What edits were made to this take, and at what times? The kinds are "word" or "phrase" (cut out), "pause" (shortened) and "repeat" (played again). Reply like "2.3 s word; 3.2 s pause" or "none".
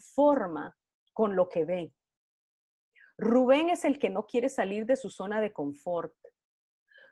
none

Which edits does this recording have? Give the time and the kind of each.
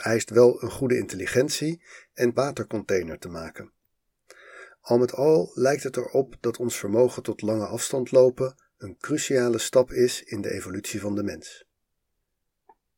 2.3 s phrase

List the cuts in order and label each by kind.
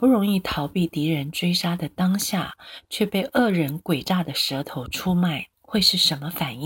5.5 s pause

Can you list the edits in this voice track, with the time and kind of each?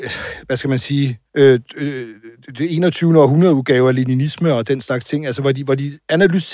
1.3 s pause

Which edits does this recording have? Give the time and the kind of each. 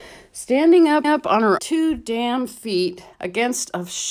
1.0 s repeat; 1.6 s word; 3.1 s pause

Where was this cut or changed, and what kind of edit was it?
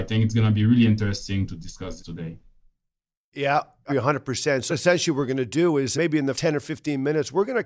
2.0 s word; 3.9 s word; 4.7 s word; 6.0 s word; 6.4 s word

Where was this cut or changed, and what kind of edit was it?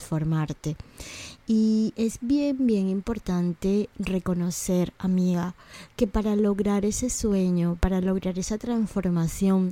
none

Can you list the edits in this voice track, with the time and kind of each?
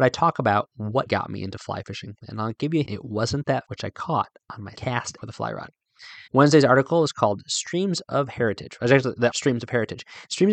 1.1 s word; 2.8 s word; 3.6 s word; 4.7 s word; 5.2 s word; 6.3 s pause; 9.3 s phrase

